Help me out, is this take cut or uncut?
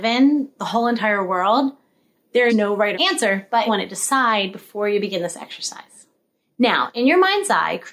cut